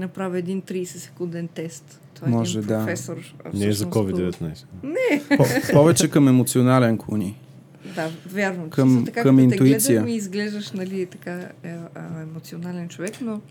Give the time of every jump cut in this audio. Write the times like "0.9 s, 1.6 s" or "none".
none